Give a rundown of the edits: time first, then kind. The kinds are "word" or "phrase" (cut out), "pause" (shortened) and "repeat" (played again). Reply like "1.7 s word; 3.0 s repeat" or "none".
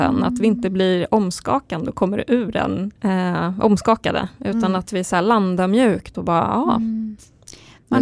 3.0 s pause